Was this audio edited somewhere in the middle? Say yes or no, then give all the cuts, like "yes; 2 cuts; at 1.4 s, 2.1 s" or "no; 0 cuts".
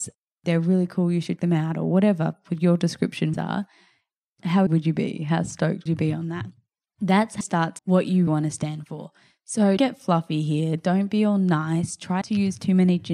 yes; 9 cuts; at 1.4 s, 3.3 s, 4.7 s, 5.9 s, 7.4 s, 7.8 s, 8.3 s, 9.8 s, 12.2 s